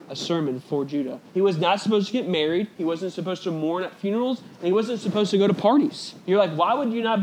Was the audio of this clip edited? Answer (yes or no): yes